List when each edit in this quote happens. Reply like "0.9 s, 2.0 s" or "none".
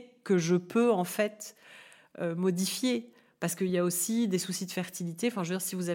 none